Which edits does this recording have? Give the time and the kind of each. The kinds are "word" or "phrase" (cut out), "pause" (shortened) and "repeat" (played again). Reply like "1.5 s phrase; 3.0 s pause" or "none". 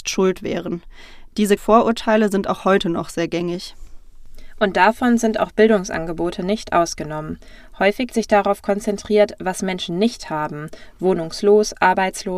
1.6 s word; 8.1 s word